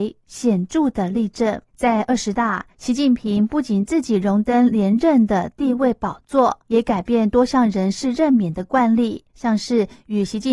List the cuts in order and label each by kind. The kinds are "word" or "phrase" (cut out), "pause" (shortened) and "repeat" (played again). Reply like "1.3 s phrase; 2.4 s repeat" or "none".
1.7 s pause; 2.7 s pause; 6.6 s pause; 9.3 s pause